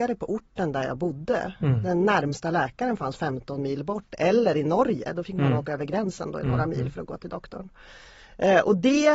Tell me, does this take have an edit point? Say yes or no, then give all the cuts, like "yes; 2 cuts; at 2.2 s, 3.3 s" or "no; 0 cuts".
no; 0 cuts